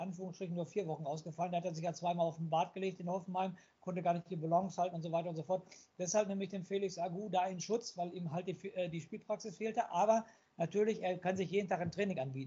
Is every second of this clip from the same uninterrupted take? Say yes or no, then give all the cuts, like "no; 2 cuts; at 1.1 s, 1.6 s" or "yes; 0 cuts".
yes; 0 cuts